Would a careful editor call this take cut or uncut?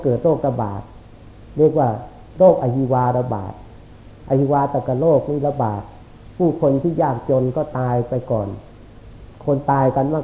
cut